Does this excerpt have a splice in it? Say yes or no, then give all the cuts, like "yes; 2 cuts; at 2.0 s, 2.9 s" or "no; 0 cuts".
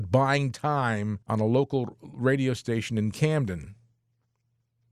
yes; 1 cut; at 1.2 s